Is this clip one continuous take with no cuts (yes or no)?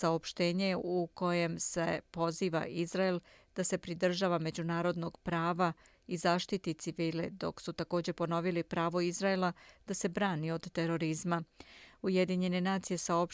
yes